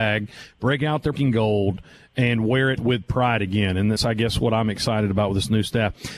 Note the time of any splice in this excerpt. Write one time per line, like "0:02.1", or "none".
0:01.1
0:02.8
0:04.0